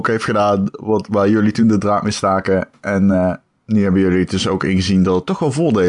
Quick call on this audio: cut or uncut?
uncut